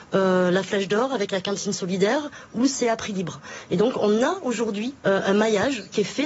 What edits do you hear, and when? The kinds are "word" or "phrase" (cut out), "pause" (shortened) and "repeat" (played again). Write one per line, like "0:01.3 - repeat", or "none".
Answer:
0:05.0 - pause